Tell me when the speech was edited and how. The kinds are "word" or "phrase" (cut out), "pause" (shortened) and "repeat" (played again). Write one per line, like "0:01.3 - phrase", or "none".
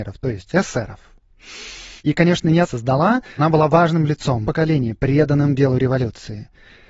0:02.0 - pause
0:02.6 - phrase
0:03.4 - word
0:04.4 - phrase